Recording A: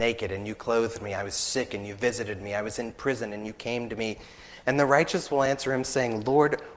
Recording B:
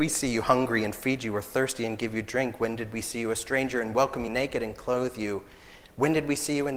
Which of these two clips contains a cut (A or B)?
B